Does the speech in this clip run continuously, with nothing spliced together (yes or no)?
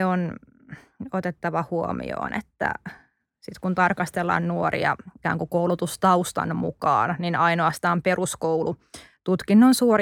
yes